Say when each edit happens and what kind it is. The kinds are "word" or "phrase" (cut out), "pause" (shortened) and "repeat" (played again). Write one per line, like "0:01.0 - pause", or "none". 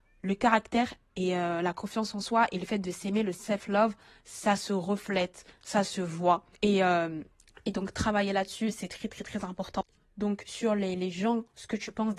0:06.5 - pause
0:07.3 - pause